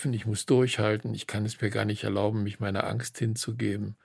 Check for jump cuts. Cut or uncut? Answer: uncut